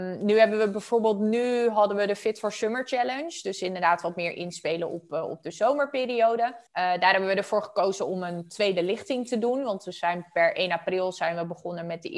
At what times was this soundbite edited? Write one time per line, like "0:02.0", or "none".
0:06.7